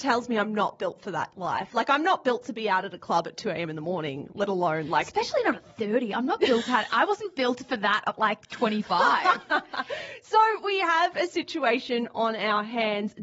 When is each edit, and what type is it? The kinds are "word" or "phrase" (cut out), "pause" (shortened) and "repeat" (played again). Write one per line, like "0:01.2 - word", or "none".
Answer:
none